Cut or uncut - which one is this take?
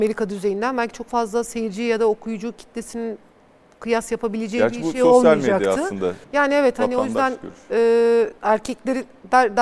cut